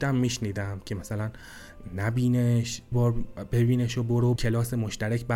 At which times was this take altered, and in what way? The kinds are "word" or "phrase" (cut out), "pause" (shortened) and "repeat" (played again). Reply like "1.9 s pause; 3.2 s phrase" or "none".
2.9 s word; 4.4 s word